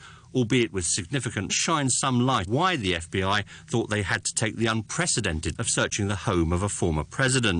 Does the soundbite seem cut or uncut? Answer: cut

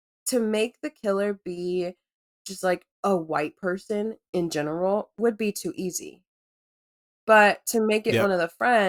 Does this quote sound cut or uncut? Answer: uncut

